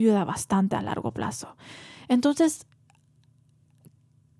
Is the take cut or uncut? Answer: uncut